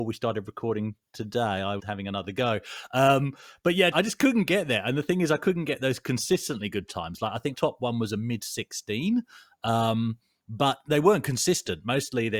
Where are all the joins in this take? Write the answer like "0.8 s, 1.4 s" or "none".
1.8 s, 3.9 s, 7.5 s